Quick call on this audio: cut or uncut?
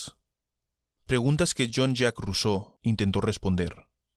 uncut